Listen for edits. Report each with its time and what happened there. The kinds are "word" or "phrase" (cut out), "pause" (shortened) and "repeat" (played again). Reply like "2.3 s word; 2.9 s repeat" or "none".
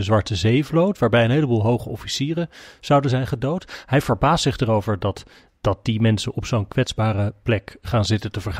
none